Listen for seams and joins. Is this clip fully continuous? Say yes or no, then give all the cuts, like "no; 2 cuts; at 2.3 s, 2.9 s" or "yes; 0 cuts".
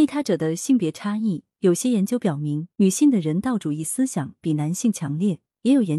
no; 1 cut; at 2.7 s